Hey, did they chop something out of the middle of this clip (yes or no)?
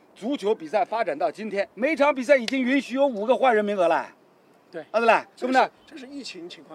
yes